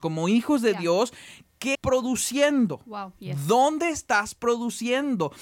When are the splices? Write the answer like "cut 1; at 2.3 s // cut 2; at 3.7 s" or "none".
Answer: cut 1; at 1.7 s

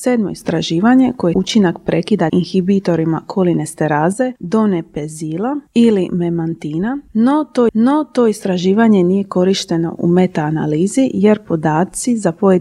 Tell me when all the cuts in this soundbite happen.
cut 1; at 1.3 s // cut 2; at 2.3 s // cut 3; at 7.7 s

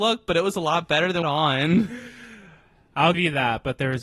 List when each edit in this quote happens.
cut 1; at 1.2 s // cut 2; at 3.1 s

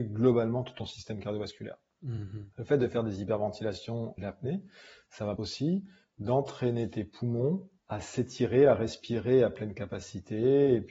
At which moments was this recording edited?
cut 1; at 2.5 s // cut 2; at 4.2 s // cut 3; at 5.4 s // cut 4; at 7.8 s

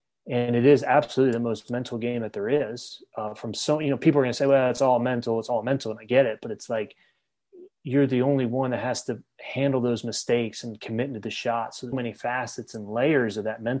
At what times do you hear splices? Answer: cut 1; at 11.9 s

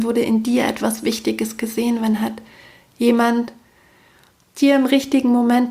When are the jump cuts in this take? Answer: none

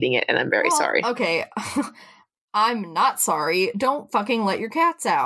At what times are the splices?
none

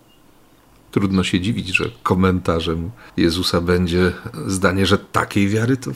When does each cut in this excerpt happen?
cut 1; at 3.1 s

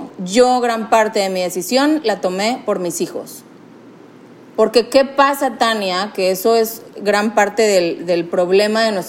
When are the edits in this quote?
none

